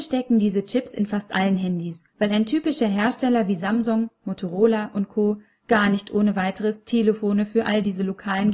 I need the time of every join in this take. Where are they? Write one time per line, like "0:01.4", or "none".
0:02.1